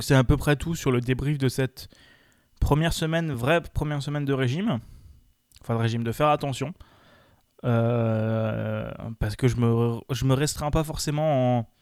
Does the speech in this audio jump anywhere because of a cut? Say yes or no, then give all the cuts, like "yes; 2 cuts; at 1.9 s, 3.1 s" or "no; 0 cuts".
no; 0 cuts